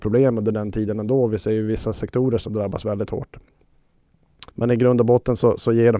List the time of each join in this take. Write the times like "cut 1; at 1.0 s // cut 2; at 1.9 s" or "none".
cut 1; at 4.5 s